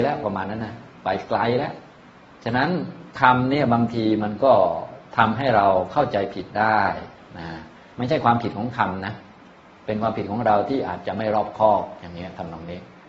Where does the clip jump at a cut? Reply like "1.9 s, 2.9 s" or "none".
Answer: 3.1 s